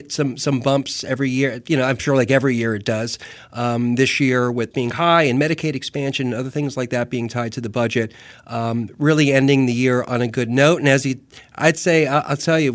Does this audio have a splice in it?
yes; 1 cut; at 4.7 s

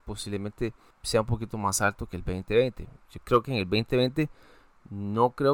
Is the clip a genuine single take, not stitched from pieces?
no; 1 cut; at 0.9 s

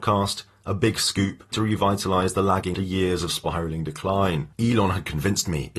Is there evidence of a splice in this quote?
yes; 2 cuts; at 1.5 s, 2.7 s

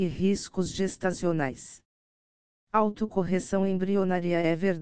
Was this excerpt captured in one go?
yes; 0 cuts

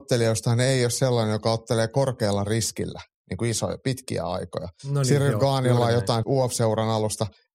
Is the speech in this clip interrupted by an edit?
yes; 1 cut; at 6.2 s

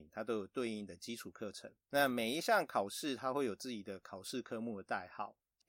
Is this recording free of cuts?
no; 1 cut; at 1.8 s

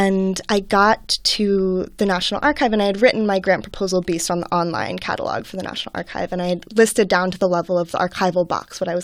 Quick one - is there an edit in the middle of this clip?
no; 0 cuts

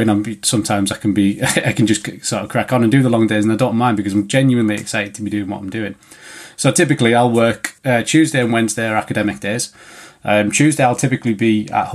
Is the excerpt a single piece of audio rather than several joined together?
yes; 0 cuts

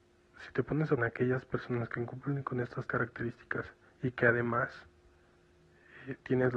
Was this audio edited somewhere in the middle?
yes; 3 cuts; at 1.0 s, 2.9 s, 3.9 s

